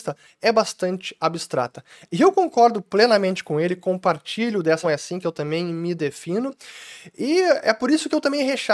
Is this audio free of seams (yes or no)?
no